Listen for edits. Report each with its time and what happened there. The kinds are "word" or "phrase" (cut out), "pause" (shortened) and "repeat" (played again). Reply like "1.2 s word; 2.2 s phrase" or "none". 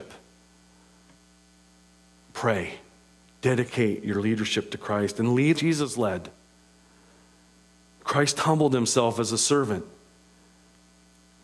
3.2 s pause; 5.6 s word